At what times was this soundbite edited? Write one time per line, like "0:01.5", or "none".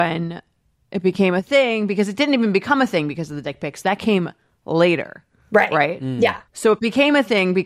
0:06.5